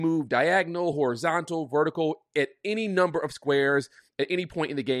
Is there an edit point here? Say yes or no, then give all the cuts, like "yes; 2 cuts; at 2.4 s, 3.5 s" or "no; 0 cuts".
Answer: no; 0 cuts